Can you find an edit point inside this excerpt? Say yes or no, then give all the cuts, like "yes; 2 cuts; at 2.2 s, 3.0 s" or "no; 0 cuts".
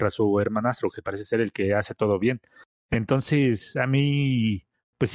no; 0 cuts